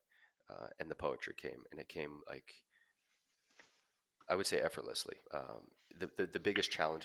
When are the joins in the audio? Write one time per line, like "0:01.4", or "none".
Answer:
0:02.2
0:05.3